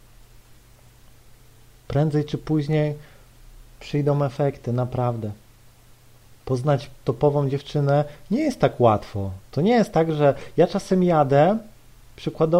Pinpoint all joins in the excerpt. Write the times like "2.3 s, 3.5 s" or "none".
none